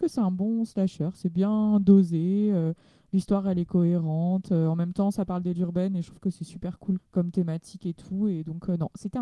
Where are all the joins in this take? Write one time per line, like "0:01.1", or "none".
0:05.6
0:07.0